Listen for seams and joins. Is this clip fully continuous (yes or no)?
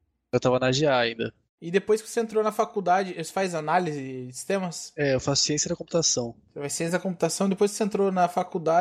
no